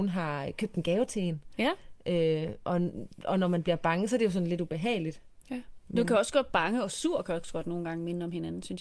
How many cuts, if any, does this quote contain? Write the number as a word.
zero